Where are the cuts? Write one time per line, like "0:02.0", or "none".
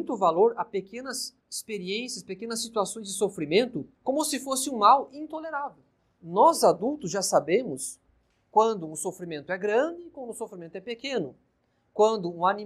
0:01.4
0:03.9
0:06.0